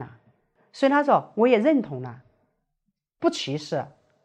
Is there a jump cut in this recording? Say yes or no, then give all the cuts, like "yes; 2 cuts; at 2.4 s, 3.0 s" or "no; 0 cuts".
no; 0 cuts